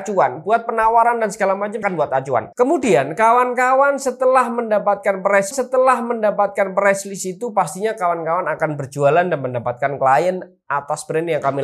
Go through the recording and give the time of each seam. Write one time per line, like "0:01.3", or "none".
0:01.8
0:02.5
0:05.5